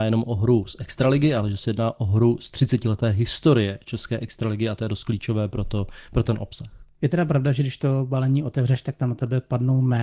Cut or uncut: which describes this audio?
uncut